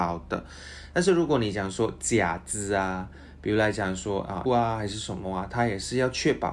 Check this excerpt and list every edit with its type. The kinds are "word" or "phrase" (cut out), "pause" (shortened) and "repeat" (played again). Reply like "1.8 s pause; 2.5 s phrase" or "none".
4.5 s phrase